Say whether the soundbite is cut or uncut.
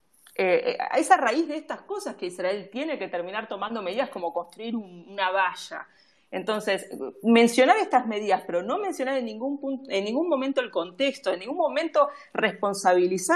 uncut